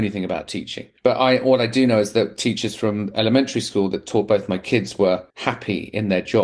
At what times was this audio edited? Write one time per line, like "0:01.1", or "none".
0:01.0
0:05.3

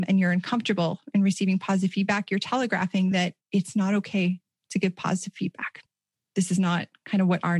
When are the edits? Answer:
none

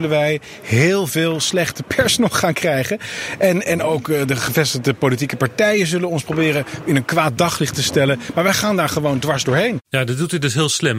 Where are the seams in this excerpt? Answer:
none

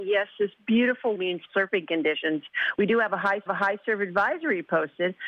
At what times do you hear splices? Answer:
0:01.1
0:01.5
0:03.5

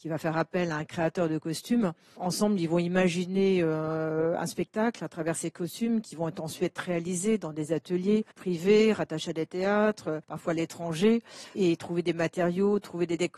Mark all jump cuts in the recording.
0:08.3
0:10.2

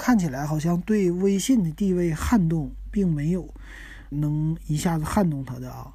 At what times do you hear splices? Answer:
0:04.1

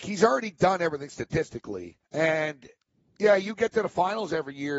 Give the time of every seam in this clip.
0:02.0

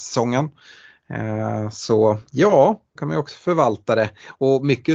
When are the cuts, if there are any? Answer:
0:03.0

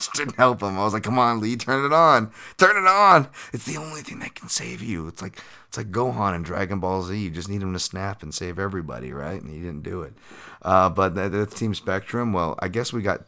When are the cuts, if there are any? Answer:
none

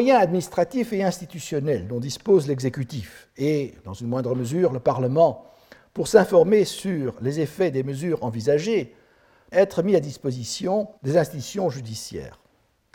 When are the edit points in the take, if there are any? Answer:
0:09.5
0:11.0

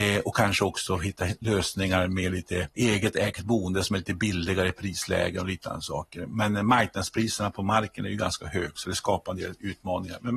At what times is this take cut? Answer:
0:02.7

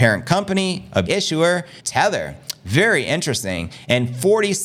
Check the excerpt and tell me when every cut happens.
0:01.1
0:01.8

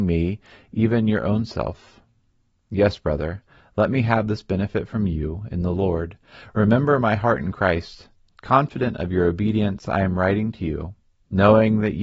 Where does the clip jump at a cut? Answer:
none

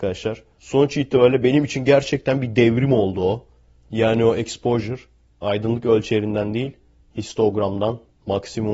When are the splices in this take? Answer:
none

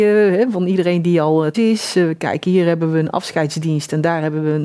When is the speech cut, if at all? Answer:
0:01.5

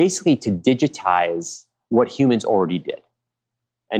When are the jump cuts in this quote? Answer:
none

